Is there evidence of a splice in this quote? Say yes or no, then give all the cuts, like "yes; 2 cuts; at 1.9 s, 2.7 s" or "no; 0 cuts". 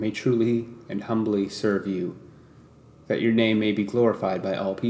no; 0 cuts